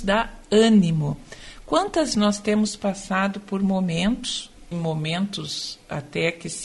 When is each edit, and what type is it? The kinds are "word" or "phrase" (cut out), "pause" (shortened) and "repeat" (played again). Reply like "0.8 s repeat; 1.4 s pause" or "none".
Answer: 2.1 s word; 4.7 s word